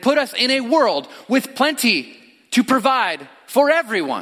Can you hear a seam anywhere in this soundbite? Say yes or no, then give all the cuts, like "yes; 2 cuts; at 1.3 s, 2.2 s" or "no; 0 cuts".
no; 0 cuts